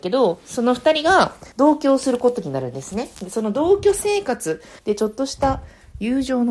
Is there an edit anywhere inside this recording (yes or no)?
yes